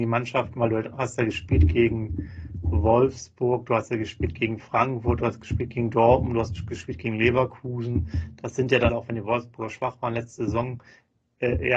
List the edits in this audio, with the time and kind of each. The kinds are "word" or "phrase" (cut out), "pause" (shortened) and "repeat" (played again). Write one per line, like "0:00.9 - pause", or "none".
0:08.9 - word